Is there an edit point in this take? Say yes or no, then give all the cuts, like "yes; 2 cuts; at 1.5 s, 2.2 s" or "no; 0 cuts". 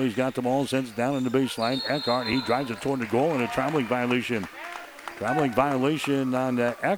no; 0 cuts